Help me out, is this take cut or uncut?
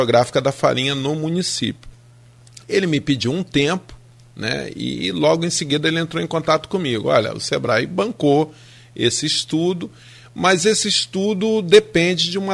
uncut